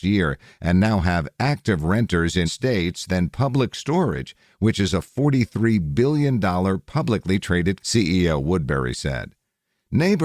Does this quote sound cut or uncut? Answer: cut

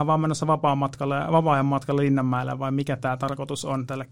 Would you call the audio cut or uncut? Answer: uncut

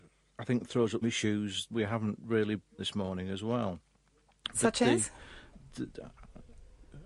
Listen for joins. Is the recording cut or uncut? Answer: cut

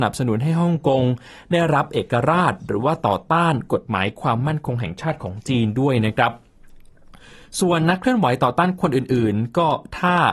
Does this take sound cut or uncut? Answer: uncut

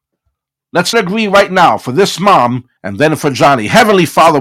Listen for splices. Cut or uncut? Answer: cut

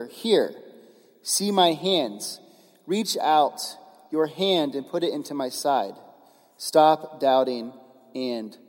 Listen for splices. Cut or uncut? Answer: uncut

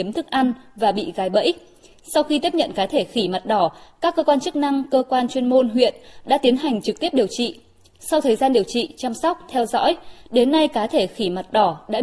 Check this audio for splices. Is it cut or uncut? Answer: uncut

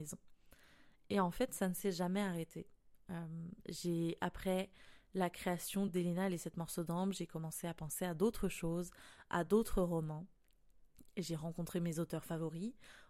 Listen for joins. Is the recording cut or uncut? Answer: uncut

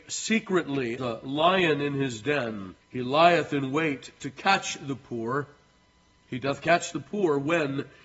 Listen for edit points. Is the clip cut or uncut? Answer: cut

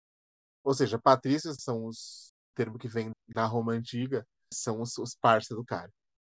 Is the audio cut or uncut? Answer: cut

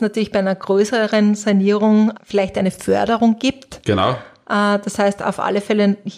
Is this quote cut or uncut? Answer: cut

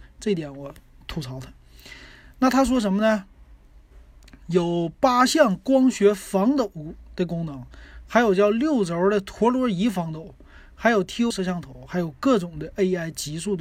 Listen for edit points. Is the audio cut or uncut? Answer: cut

